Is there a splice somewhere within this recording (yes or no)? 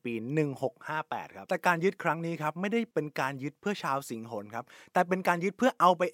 no